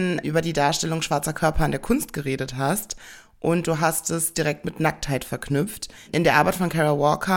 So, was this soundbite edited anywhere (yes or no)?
no